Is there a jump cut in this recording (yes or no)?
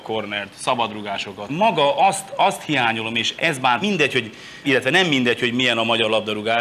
yes